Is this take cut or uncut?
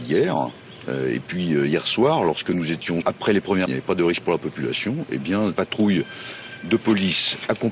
cut